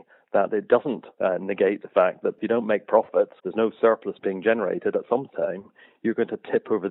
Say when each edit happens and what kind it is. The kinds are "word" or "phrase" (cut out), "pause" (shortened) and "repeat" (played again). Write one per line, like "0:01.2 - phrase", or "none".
0:01.1 - pause
0:03.4 - pause